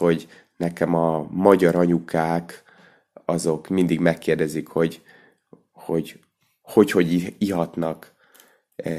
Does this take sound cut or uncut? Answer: uncut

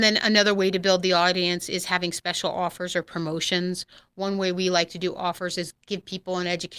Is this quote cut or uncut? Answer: cut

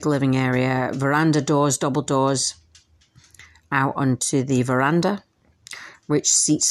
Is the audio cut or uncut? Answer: uncut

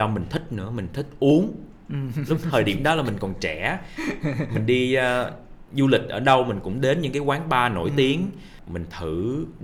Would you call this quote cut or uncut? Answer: uncut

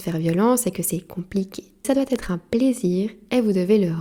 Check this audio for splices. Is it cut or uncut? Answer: cut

